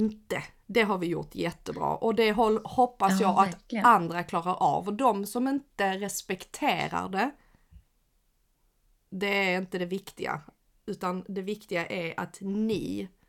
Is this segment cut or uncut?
uncut